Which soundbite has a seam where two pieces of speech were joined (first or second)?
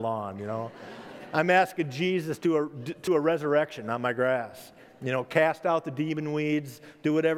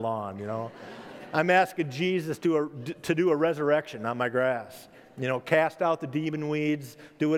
first